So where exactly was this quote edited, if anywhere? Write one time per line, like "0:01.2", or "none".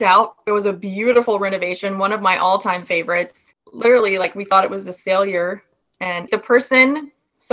0:06.3